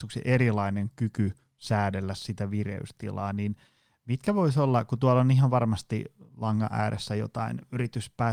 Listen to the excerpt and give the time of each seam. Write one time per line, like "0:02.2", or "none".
none